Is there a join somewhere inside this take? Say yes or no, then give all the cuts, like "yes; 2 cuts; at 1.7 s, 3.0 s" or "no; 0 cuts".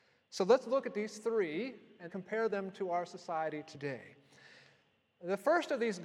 yes; 1 cut; at 2.1 s